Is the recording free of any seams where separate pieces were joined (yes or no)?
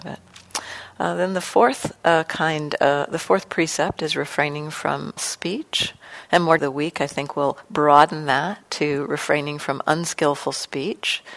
no